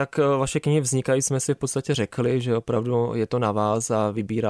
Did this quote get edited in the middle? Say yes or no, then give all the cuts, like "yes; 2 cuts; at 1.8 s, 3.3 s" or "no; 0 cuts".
no; 0 cuts